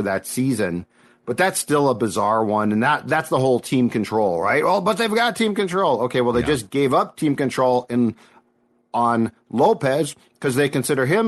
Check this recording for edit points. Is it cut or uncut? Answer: uncut